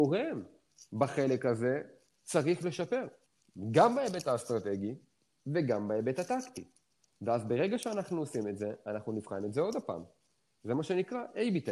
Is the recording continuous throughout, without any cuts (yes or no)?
yes